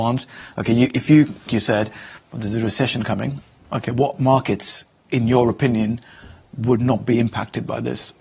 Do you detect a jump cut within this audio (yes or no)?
yes